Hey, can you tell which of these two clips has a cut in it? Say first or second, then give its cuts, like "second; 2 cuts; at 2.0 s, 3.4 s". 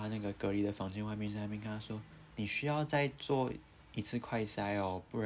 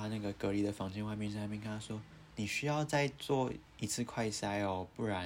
second; 1 cut; at 3.7 s